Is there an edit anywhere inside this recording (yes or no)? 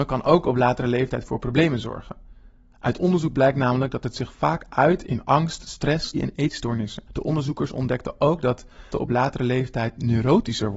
yes